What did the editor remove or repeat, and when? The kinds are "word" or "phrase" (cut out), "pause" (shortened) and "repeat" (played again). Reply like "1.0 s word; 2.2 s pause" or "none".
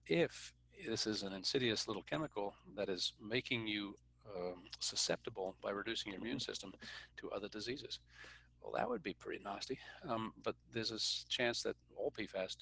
none